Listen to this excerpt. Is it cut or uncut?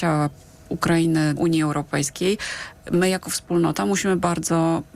cut